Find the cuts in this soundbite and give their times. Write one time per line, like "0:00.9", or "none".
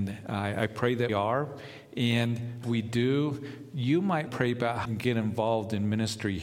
0:01.1
0:02.6
0:04.3
0:04.9